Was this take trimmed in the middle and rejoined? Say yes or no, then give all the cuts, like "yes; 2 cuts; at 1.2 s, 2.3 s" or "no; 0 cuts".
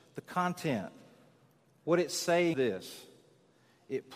yes; 1 cut; at 2.5 s